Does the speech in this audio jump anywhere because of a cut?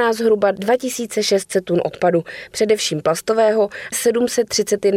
yes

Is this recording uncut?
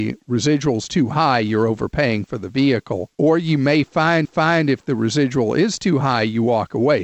no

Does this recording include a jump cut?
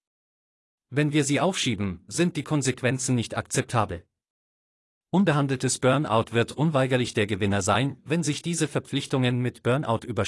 no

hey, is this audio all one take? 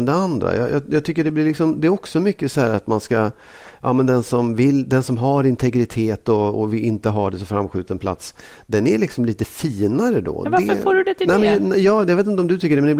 yes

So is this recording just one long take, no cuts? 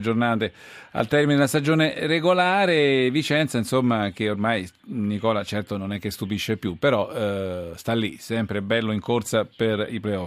yes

